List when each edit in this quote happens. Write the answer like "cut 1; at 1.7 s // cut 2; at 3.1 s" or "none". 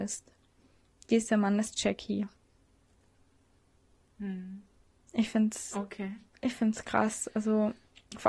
none